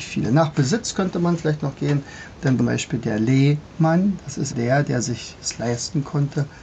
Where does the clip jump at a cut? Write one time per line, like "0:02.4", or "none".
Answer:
0:02.6
0:04.5